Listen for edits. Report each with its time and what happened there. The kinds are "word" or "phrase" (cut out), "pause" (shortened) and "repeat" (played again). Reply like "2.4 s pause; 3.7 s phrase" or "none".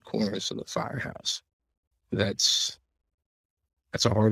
1.9 s pause

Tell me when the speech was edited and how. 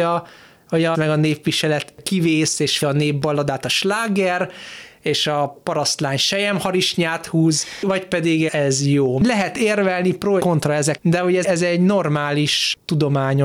0.9 s word; 2.8 s word; 8.5 s word; 10.4 s word; 11.0 s word; 11.4 s word

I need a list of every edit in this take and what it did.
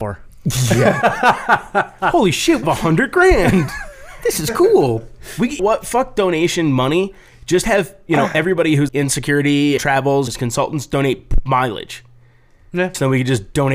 2.6 s word; 5.6 s word; 8.9 s word; 9.8 s word; 10.3 s word

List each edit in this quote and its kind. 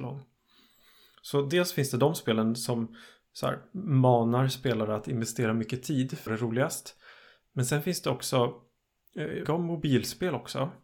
6.3 s word; 9.4 s phrase

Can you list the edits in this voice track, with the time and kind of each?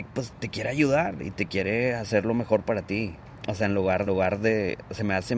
4.1 s repeat

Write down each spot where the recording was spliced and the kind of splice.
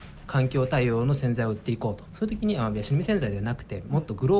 2.1 s phrase

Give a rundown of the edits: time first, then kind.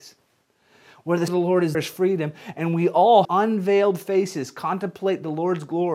1.3 s word; 1.7 s word; 3.2 s phrase

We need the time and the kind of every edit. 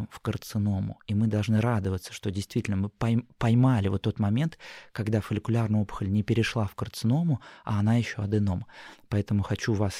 none

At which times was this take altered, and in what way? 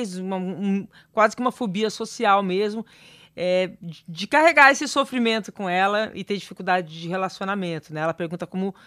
none

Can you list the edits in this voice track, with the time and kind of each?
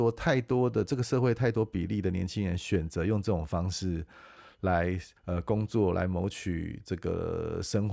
5.2 s pause

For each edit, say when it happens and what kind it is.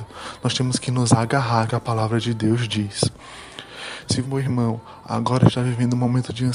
1.7 s word; 4.2 s word

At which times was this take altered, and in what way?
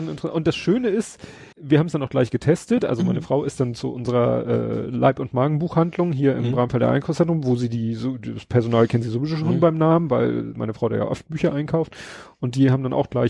1.5 s pause

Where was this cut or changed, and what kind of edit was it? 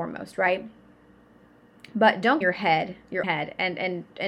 2.4 s phrase; 3.2 s word

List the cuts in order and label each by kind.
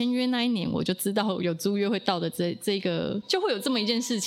3.2 s word

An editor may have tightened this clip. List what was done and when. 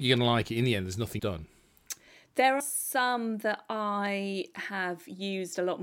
1.2 s word; 2.6 s word

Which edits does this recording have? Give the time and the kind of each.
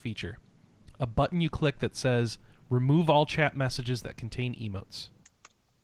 none

